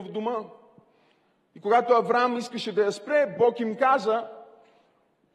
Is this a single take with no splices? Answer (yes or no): yes